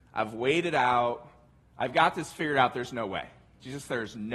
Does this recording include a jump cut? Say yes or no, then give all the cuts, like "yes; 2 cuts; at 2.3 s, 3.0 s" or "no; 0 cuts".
no; 0 cuts